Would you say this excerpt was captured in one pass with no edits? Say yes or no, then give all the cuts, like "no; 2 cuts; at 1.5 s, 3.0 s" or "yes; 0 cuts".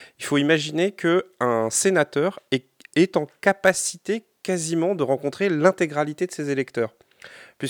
yes; 0 cuts